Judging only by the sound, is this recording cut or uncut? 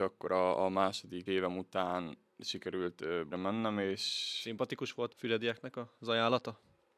cut